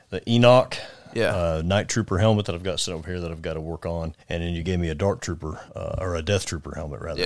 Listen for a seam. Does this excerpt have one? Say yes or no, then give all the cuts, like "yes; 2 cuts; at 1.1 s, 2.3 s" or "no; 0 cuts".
yes; 2 cuts; at 4.2 s, 5.7 s